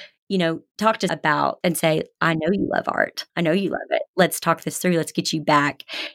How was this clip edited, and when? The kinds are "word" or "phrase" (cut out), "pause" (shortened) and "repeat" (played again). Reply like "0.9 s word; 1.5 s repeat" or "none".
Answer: 1.1 s word; 1.6 s word; 3.3 s pause

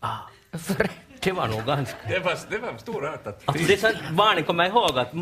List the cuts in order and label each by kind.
none

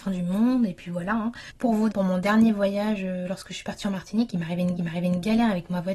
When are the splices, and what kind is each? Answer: 1.5 s pause; 1.9 s word; 4.8 s repeat

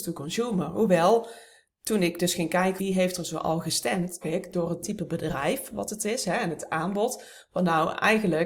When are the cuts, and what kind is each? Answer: 2.8 s word; 4.2 s word

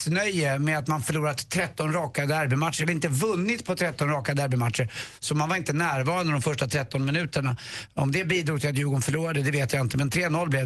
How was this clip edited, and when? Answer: none

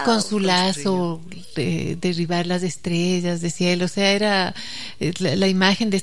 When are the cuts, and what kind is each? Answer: none

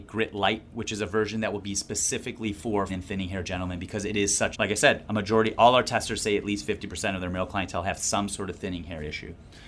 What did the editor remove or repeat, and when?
2.9 s word; 4.5 s word

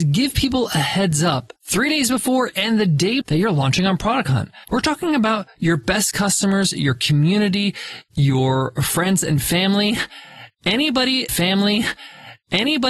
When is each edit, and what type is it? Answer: 1.6 s pause; 3.2 s word; 4.6 s pause; 11.3 s repeat

